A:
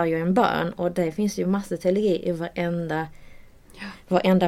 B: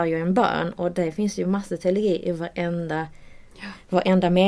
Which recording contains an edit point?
B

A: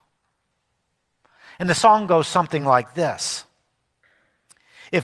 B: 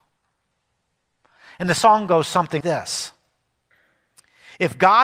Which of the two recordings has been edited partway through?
B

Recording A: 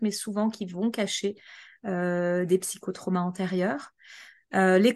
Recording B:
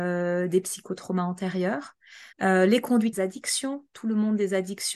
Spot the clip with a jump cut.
B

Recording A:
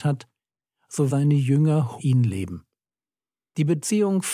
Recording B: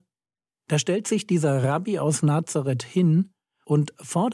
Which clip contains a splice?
A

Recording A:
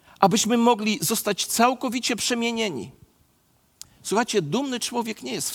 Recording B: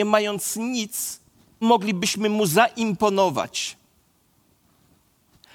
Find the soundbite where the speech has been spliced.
B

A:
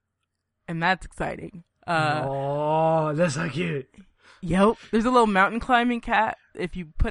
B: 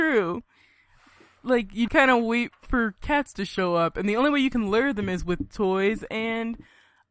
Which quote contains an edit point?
B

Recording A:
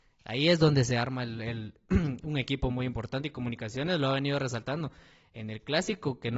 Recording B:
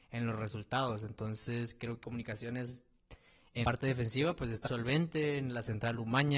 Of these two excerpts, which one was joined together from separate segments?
B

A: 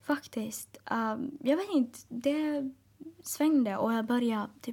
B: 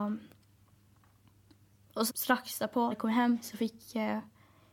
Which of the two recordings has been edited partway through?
B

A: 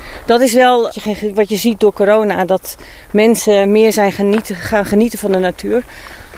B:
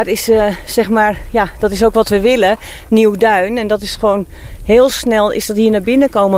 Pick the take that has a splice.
A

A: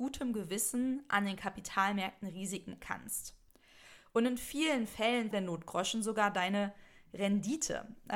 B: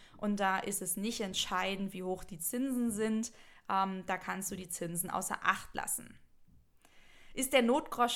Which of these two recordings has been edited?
A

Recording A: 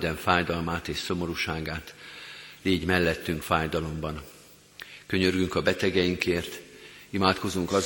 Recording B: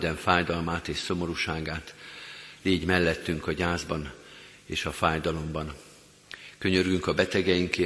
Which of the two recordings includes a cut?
A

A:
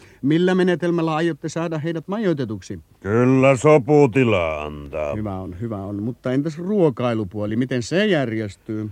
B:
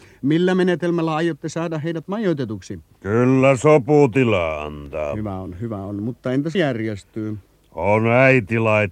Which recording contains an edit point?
B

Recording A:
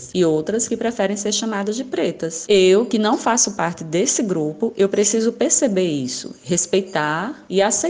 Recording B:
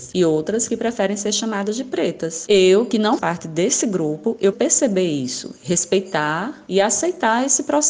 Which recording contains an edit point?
B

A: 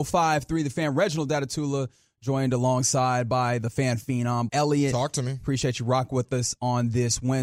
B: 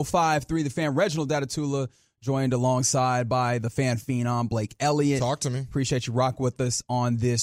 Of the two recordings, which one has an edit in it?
A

